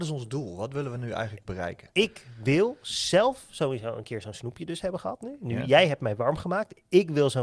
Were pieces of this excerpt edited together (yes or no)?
no